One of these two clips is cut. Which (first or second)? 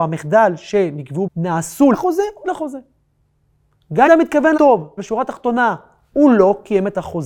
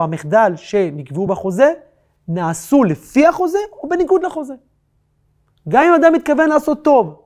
first